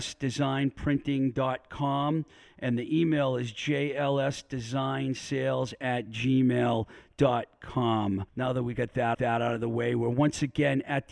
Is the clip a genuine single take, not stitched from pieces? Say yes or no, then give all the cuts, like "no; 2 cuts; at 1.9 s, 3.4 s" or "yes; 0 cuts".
no; 2 cuts; at 8.3 s, 9.1 s